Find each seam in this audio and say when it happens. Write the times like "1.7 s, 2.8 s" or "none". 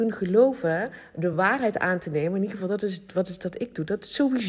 none

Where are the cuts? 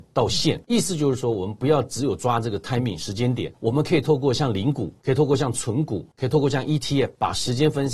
none

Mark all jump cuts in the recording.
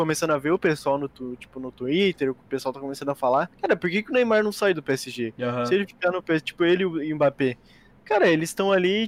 3.5 s

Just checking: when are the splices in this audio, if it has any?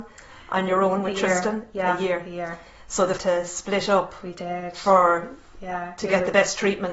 3.2 s

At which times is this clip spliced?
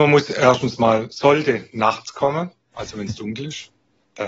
none

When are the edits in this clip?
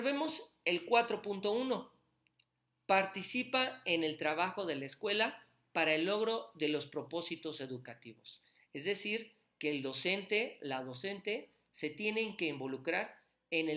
none

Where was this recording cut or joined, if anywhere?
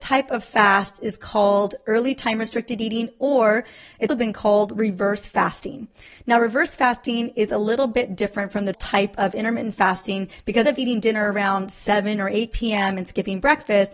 4.1 s, 8.7 s, 10.6 s

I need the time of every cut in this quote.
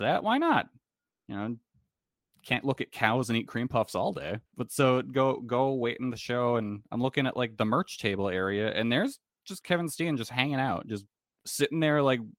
4.5 s, 9.6 s

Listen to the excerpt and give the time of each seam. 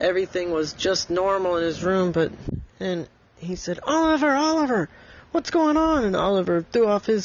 2.7 s

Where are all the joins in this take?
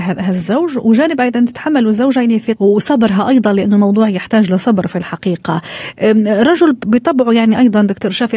2.6 s

